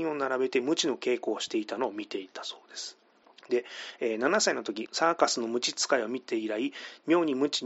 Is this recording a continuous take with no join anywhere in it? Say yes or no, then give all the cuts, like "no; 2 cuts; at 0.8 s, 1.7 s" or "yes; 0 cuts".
yes; 0 cuts